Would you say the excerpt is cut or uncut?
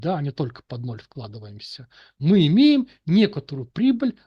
uncut